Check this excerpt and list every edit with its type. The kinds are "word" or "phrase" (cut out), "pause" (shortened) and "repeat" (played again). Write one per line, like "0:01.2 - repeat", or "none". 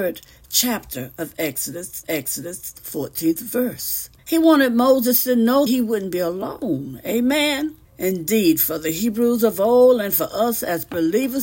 0:02.0 - repeat
0:04.2 - pause
0:05.7 - word
0:07.9 - pause